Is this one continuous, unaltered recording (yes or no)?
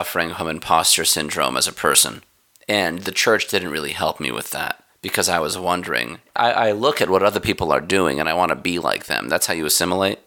yes